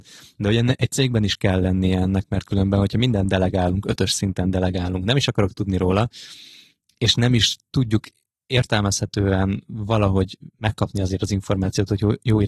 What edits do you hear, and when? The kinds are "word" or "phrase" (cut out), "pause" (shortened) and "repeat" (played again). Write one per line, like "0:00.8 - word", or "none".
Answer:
none